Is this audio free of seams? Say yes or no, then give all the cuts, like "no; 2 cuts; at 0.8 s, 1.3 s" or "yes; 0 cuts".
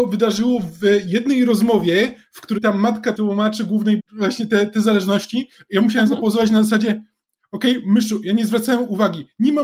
no; 3 cuts; at 2.6 s, 3.1 s, 4.0 s